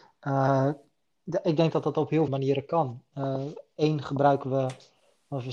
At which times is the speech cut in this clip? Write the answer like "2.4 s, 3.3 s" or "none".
2.3 s